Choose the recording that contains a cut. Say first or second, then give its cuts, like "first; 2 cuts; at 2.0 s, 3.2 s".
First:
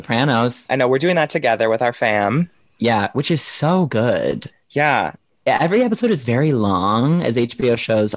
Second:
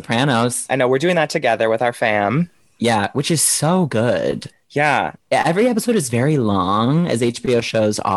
second; 1 cut; at 5.2 s